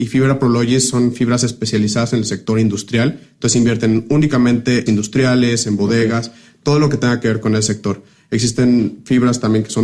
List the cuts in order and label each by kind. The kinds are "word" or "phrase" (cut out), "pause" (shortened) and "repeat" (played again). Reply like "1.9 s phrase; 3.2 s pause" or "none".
4.9 s phrase; 7.4 s word